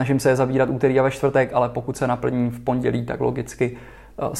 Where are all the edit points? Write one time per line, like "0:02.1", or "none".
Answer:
none